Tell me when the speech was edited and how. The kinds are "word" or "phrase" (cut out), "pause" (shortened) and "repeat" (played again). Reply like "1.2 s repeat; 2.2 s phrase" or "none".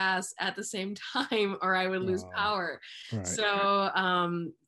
none